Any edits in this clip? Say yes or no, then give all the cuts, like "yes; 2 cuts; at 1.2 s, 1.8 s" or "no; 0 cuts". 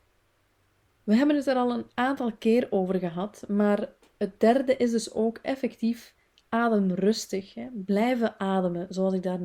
no; 0 cuts